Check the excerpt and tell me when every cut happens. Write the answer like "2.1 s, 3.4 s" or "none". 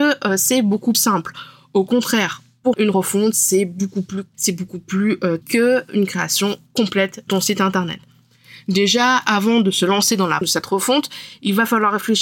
0.9 s, 2.7 s, 4.3 s, 5.4 s, 7.3 s, 10.4 s